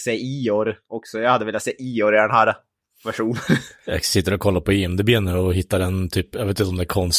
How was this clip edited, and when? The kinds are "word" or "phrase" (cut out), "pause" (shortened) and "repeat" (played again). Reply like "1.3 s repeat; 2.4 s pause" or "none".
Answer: none